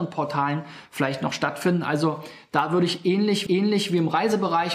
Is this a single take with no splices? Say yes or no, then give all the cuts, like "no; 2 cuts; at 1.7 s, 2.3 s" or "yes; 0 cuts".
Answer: no; 1 cut; at 3.5 s